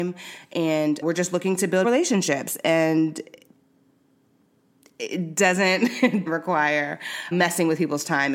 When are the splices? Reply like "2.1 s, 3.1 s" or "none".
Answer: 1.0 s, 1.8 s, 6.3 s, 7.3 s